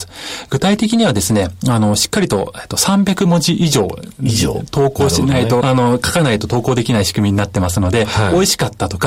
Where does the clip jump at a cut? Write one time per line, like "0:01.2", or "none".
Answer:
0:05.6